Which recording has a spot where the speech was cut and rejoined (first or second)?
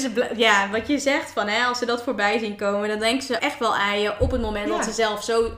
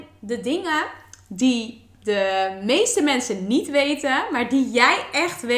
first